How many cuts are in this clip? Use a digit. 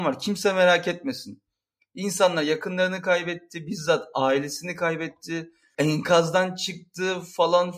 0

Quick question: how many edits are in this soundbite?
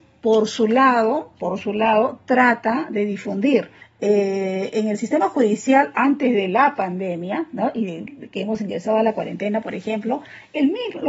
1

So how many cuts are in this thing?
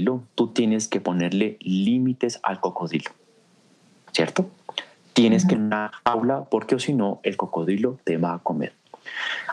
1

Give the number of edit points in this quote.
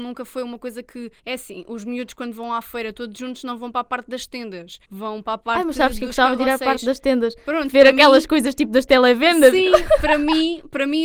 2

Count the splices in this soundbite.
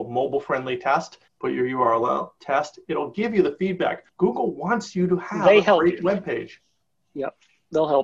2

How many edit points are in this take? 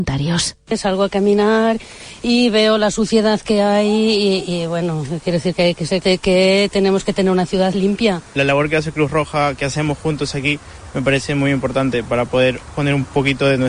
1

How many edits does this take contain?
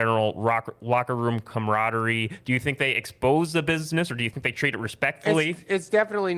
0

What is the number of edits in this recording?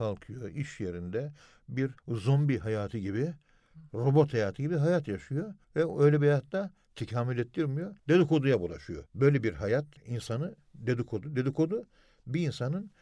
5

